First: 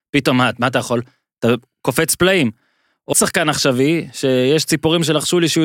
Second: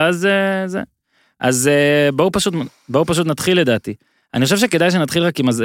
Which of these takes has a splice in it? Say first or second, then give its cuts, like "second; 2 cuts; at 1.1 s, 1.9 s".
first; 1 cut; at 3.1 s